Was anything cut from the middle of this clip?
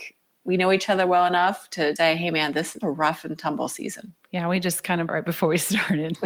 yes; 4 cuts; at 2.0 s, 2.8 s, 4.2 s, 5.1 s

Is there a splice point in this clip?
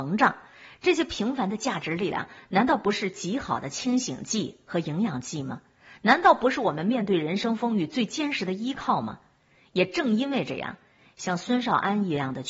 no; 0 cuts

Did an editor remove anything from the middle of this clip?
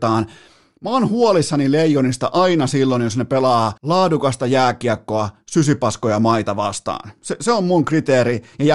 yes; 1 cut; at 3.8 s

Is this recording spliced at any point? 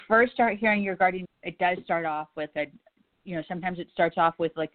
yes; 2 cuts; at 1.2 s, 2.5 s

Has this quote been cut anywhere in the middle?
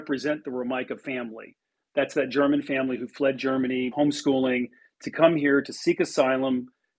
yes; 1 cut; at 3.9 s

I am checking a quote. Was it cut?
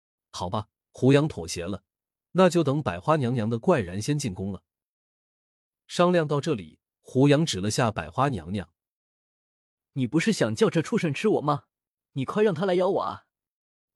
no; 0 cuts

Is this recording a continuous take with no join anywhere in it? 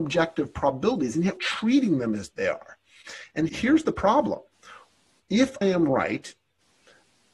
no; 4 cuts; at 1.4 s, 2.3 s, 3.5 s, 5.6 s

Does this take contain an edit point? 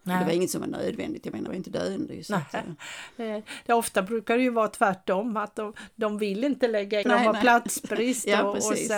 yes; 2 cuts; at 1.5 s, 7.0 s

